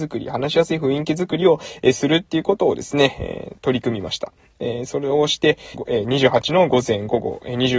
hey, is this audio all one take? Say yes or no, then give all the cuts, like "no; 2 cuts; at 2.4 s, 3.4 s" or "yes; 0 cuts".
no; 1 cut; at 5.7 s